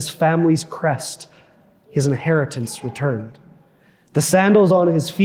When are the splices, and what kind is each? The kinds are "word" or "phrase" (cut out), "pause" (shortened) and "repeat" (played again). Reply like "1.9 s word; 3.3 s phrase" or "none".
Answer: none

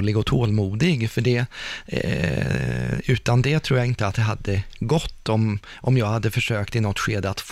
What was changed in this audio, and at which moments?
none

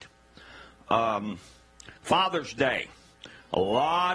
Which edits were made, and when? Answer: 2.0 s pause

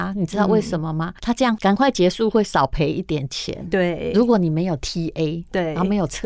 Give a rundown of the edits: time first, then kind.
1.2 s pause

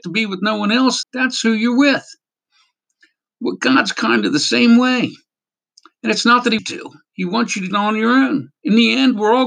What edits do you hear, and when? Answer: 1.0 s word; 6.6 s word; 7.7 s word

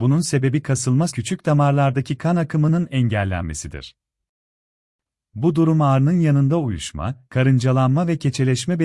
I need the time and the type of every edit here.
1.1 s word

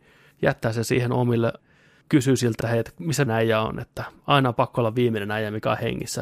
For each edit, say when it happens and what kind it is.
1.6 s word; 2.6 s phrase; 3.3 s word

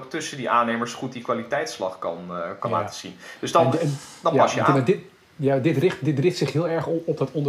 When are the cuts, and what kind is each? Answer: 2.6 s word

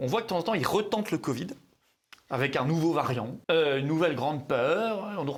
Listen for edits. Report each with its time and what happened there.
3.4 s pause

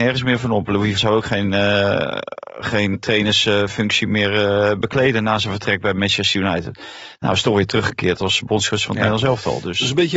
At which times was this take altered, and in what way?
1.0 s word; 2.9 s word

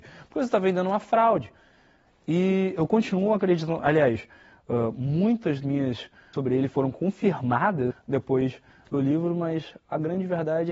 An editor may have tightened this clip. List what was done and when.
5.6 s word; 6.3 s word; 7.9 s word; 8.9 s word

